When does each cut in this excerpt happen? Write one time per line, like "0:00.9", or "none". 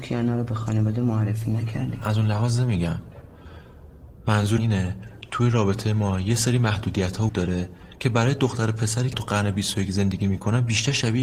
0:04.6
0:07.3
0:09.1